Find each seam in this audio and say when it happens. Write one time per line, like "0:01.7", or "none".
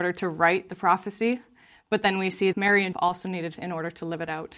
0:02.5
0:02.9
0:03.6